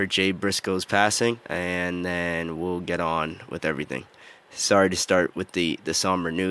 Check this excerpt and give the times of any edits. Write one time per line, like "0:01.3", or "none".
none